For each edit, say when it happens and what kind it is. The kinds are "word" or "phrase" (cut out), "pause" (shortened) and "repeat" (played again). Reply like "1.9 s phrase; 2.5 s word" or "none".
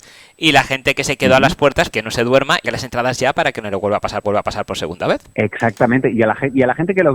1.9 s word; 2.6 s word; 4.2 s repeat